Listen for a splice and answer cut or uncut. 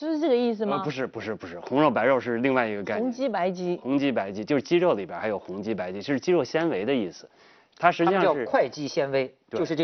uncut